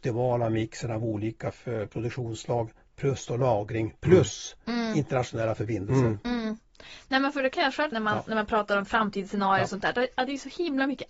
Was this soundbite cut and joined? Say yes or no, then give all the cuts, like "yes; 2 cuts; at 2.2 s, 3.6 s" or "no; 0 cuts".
yes; 1 cut; at 7.9 s